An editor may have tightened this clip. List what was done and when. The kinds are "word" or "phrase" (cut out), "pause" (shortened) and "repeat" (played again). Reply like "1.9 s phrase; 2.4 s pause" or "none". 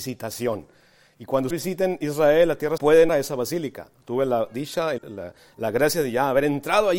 1.5 s word; 2.8 s word; 3.1 s word; 5.0 s word